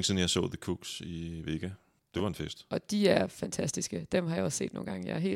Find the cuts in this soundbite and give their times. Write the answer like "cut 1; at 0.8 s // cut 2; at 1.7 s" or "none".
cut 1; at 2.0 s